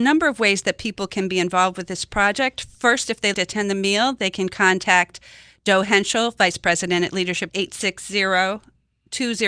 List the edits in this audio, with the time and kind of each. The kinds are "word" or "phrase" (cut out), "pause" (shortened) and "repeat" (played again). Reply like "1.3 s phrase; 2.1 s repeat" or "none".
3.3 s word; 7.5 s phrase